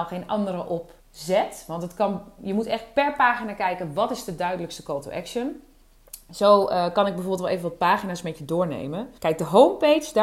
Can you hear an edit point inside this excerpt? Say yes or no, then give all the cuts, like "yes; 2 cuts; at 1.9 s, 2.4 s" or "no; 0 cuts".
yes; 2 cuts; at 1.0 s, 9.2 s